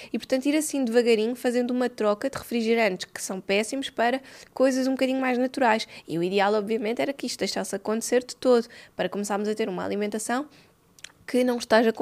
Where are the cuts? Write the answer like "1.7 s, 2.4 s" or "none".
none

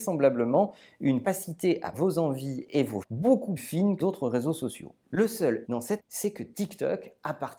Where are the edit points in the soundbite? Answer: 1.2 s, 1.9 s, 3.0 s, 3.6 s, 4.0 s, 5.6 s, 6.0 s

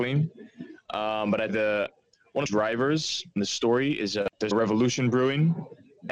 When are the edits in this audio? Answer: 1.5 s, 2.4 s, 4.5 s

